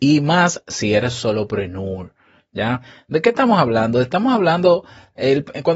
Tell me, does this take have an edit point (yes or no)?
no